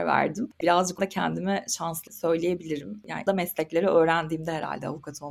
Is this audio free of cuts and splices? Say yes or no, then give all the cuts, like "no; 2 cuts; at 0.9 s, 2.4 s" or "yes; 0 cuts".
no; 3 cuts; at 1.0 s, 2.1 s, 3.3 s